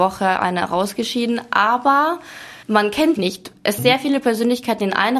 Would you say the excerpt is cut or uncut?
cut